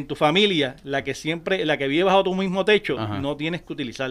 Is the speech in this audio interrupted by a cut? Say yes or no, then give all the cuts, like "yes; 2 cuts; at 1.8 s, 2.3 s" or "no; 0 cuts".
no; 0 cuts